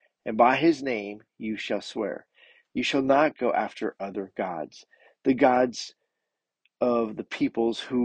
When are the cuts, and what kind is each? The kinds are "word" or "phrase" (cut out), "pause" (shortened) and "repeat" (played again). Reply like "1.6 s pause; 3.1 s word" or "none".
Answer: none